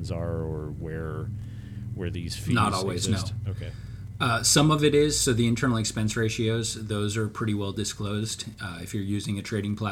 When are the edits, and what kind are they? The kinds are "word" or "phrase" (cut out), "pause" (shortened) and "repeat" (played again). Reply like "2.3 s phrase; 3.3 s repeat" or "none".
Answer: none

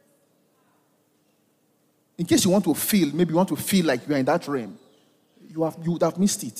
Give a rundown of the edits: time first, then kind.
none

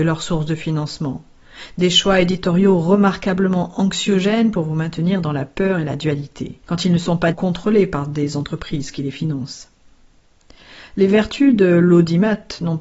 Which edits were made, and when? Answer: 6.6 s pause; 7.3 s word

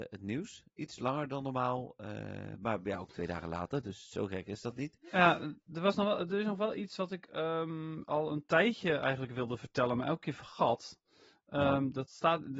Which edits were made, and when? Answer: none

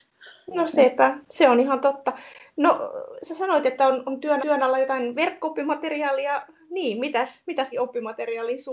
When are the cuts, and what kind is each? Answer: 4.4 s repeat; 7.7 s phrase

